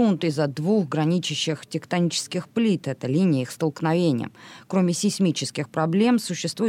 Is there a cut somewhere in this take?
no; 0 cuts

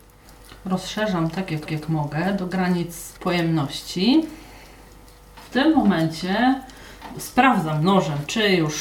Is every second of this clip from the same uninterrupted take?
no; 2 cuts; at 1.7 s, 3.2 s

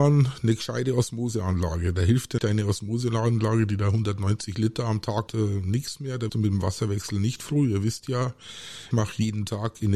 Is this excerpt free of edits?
no; 4 cuts; at 2.4 s, 5.3 s, 6.3 s, 8.9 s

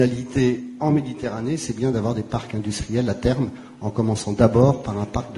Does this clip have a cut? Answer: no; 0 cuts

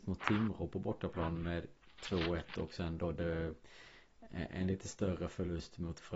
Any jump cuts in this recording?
no; 0 cuts

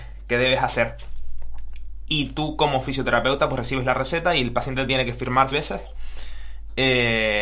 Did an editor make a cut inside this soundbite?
yes; 1 cut; at 5.5 s

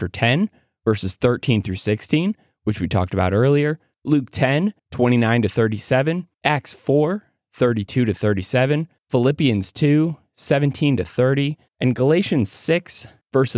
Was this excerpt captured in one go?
no; 1 cut; at 4.8 s

